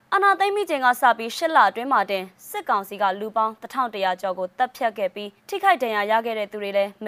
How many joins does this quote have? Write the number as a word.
one